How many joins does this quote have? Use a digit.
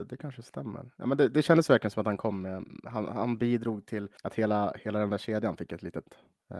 1